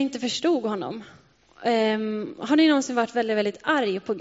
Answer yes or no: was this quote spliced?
no